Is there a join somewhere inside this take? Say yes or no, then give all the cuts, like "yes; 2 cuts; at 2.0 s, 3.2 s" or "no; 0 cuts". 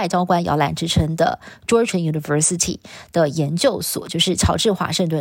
yes; 1 cut; at 1.9 s